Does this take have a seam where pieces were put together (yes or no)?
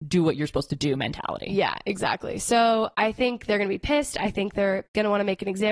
no